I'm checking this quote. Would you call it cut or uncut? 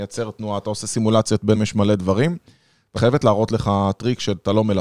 cut